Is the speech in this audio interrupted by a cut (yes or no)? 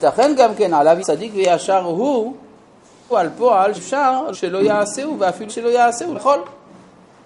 yes